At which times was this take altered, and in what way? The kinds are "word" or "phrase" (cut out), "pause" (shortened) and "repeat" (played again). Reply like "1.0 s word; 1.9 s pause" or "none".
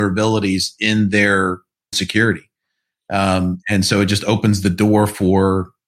1.9 s word